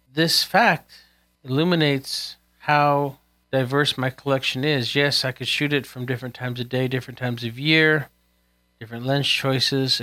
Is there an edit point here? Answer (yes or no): no